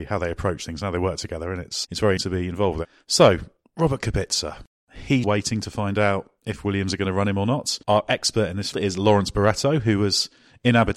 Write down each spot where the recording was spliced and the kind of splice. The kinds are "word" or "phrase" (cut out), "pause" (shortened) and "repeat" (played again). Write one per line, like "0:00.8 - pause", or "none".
0:01.8 - word
0:02.2 - word
0:03.6 - pause
0:05.2 - word
0:07.8 - pause
0:08.7 - word